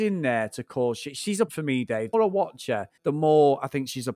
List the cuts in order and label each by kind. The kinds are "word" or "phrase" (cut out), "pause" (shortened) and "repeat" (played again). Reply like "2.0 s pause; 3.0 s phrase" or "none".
1.5 s word; 2.1 s word; 3.0 s pause

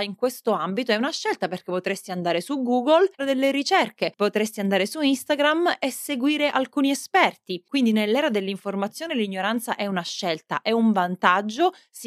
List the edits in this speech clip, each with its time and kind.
3.2 s word

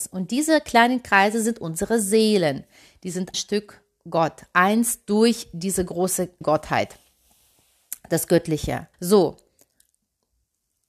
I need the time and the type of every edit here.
3.3 s phrase; 6.4 s word; 8.9 s pause

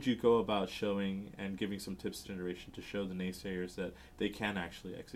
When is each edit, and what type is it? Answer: 2.2 s phrase

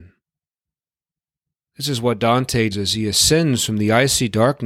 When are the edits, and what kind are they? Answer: 2.7 s word

